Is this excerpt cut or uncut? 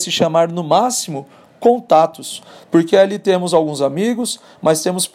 uncut